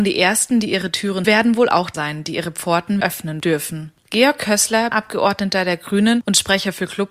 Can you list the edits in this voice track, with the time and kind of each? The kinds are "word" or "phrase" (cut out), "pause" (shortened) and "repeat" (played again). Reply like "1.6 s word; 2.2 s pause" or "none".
1.2 s phrase; 1.9 s word; 3.0 s word; 4.9 s word